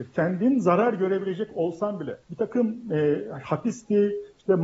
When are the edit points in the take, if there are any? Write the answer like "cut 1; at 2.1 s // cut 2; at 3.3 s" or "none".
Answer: cut 1; at 2.2 s

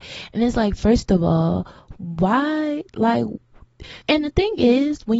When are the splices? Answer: cut 1; at 4.0 s

